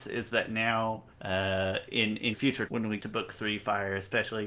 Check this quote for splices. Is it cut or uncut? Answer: cut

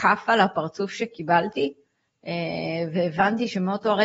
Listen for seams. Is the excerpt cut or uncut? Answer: uncut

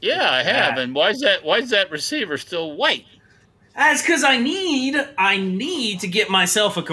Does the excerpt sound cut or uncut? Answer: uncut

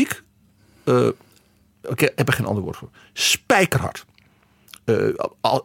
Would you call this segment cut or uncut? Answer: uncut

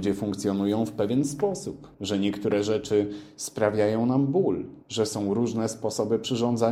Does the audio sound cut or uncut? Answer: cut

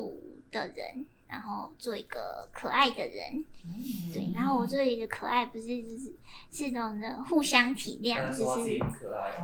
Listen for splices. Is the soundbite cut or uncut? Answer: uncut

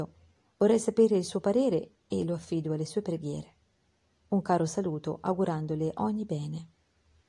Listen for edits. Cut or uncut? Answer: uncut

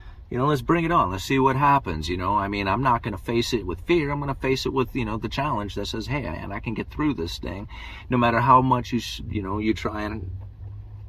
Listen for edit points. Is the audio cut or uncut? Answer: uncut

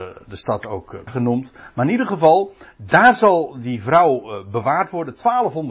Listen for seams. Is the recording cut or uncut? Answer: cut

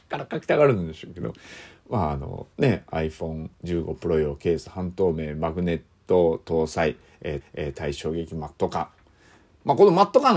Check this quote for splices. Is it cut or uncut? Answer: cut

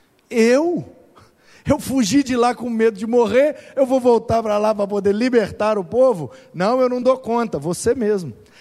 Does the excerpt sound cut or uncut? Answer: uncut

